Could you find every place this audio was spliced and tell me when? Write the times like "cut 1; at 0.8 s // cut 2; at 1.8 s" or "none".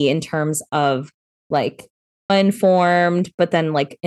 cut 1; at 2.3 s

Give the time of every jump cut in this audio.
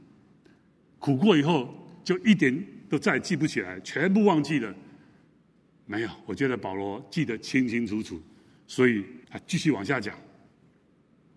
cut 1; at 9.2 s

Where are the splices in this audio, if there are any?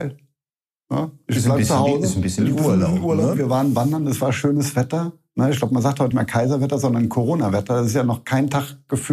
cut 1; at 6.1 s

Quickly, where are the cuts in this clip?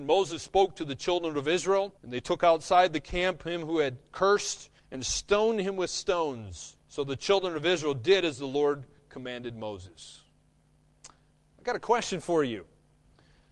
cut 1; at 2.0 s // cut 2; at 4.8 s // cut 3; at 6.8 s // cut 4; at 10.6 s

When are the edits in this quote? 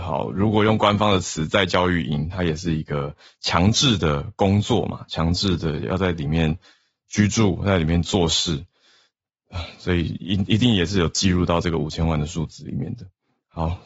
none

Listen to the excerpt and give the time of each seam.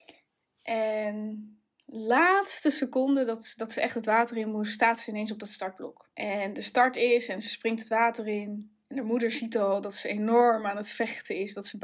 cut 1; at 6.1 s

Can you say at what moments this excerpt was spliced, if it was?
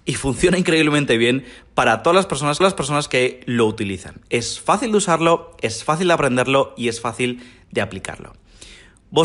cut 1; at 2.6 s

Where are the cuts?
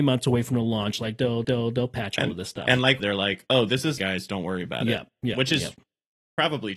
cut 1; at 1.4 s // cut 2; at 3.0 s // cut 3; at 4.0 s

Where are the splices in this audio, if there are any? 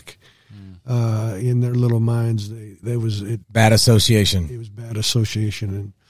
cut 1; at 2.8 s // cut 2; at 3.4 s

